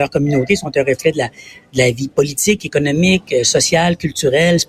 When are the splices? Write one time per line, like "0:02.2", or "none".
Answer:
none